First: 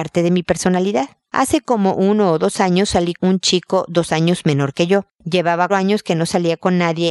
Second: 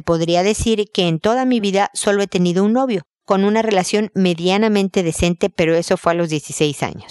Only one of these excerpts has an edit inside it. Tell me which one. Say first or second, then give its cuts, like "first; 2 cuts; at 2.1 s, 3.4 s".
first; 2 cuts; at 3.2 s, 5.7 s